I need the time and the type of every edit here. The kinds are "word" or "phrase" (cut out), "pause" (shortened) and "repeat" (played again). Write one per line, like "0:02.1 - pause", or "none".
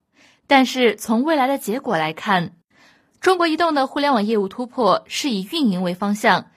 none